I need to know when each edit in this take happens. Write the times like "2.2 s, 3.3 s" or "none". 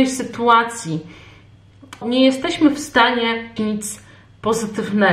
2.0 s, 3.6 s